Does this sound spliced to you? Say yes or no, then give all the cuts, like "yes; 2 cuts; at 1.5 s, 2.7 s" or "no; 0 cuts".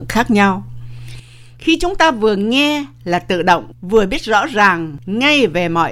no; 0 cuts